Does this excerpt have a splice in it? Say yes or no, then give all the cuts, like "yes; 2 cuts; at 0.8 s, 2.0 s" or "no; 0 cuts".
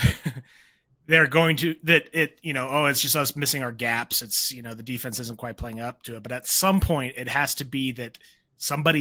no; 0 cuts